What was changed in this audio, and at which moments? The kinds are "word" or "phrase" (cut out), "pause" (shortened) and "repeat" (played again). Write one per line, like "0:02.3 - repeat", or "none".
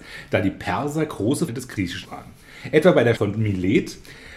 0:01.5 - word
0:02.0 - word
0:03.2 - word